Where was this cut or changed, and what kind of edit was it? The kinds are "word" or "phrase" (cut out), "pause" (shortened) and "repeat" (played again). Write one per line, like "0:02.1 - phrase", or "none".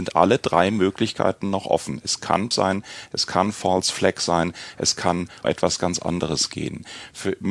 0:02.5 - word
0:05.4 - word